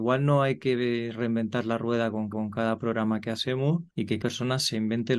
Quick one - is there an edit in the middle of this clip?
yes; 3 cuts; at 2.3 s, 3.9 s, 4.2 s

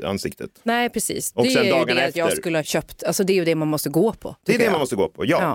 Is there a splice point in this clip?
no; 0 cuts

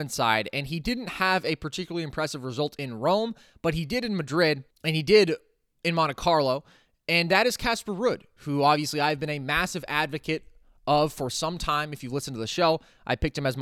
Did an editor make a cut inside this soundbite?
yes; 1 cut; at 4.7 s

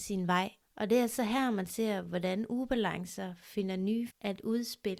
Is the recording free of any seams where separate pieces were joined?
no; 1 cut; at 4.1 s

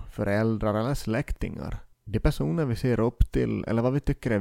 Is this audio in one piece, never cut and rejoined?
no; 1 cut; at 1.9 s

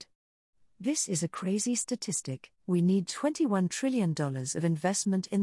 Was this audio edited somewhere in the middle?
yes; 1 cut; at 2.6 s

